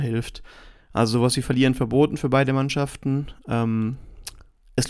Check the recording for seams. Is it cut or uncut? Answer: uncut